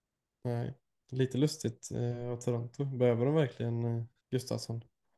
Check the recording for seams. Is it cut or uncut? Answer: cut